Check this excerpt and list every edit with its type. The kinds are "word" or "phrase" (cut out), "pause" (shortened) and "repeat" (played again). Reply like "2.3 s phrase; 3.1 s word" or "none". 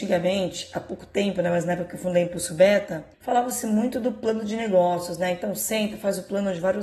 3.1 s pause